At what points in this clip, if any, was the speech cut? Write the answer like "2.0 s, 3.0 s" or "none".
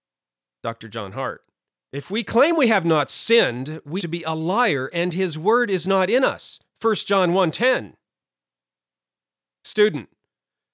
1.7 s, 4.0 s

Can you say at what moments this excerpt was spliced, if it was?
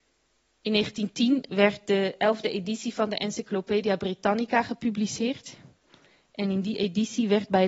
none

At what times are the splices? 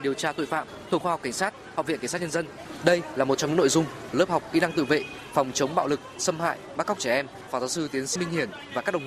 1.0 s, 4.1 s, 7.5 s, 8.2 s

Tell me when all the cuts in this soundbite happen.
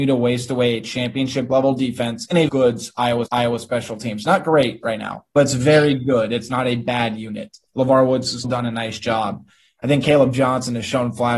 2.5 s, 3.3 s, 5.3 s, 7.7 s, 8.4 s

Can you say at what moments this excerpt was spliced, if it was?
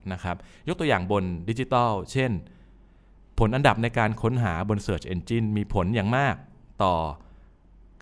none

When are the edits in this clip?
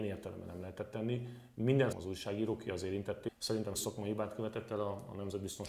1.9 s, 3.3 s, 3.8 s

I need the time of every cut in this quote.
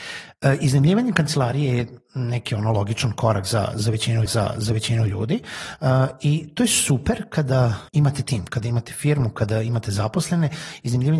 4.3 s, 7.9 s

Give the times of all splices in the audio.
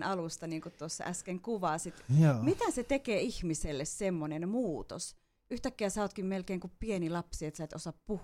none

